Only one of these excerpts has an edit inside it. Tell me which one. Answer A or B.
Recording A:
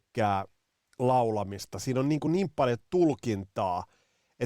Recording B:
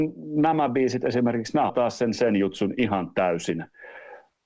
B